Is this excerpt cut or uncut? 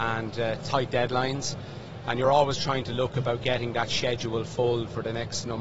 uncut